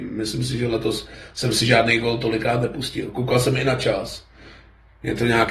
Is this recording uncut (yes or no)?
yes